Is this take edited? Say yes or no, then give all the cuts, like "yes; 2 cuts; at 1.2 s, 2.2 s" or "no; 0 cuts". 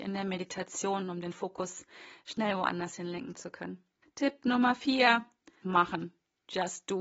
yes; 2 cuts; at 4.0 s, 5.6 s